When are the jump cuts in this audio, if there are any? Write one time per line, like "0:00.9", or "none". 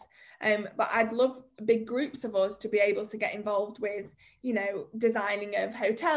none